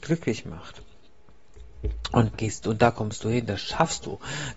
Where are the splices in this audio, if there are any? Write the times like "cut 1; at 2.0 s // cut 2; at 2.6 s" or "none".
cut 1; at 2.3 s